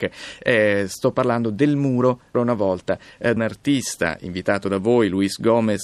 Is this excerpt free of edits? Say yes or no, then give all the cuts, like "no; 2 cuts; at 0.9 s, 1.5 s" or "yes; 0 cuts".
no; 2 cuts; at 2.3 s, 3.4 s